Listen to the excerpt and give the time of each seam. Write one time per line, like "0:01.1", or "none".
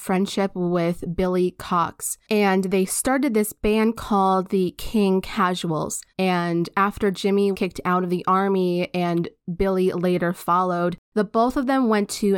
0:06.1
0:07.5
0:11.0